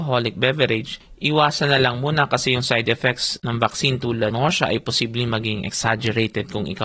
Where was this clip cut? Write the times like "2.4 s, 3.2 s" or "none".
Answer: 4.3 s